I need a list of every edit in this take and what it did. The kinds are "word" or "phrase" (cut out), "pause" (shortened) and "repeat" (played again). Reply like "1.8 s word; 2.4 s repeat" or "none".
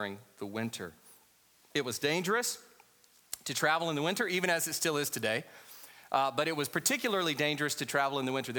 none